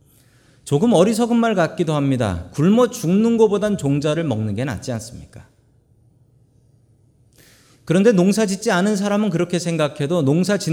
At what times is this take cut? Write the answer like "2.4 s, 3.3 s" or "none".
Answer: none